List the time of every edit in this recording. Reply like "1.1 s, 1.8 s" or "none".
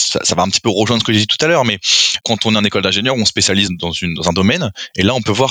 2.2 s, 3.7 s